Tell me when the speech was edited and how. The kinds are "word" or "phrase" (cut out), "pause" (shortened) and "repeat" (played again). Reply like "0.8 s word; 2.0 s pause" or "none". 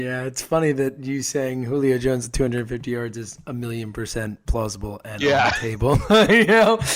none